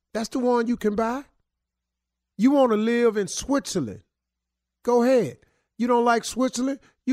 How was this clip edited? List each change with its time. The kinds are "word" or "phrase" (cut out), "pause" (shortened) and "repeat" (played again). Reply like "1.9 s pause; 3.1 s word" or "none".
none